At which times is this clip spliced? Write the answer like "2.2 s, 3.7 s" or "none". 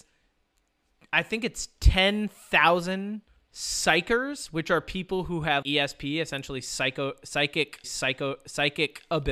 3.3 s, 5.6 s, 7.8 s